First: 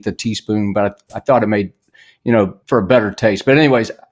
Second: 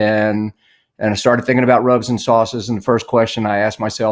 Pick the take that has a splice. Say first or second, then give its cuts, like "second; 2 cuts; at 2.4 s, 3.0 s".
first; 1 cut; at 2.6 s